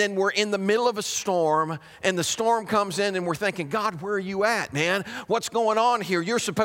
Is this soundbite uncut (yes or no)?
yes